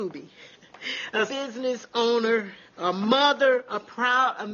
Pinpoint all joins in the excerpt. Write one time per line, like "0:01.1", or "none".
0:01.3